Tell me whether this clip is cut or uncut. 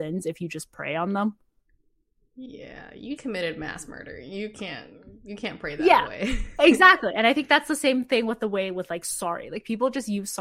cut